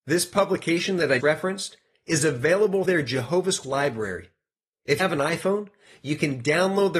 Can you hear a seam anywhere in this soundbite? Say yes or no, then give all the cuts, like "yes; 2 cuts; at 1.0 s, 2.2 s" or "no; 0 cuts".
yes; 4 cuts; at 1.2 s, 2.8 s, 3.6 s, 5.0 s